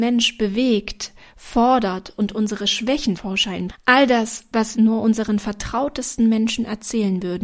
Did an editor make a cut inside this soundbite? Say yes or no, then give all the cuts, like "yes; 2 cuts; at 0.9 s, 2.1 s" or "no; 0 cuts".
yes; 3 cuts; at 3.1 s, 3.7 s, 4.7 s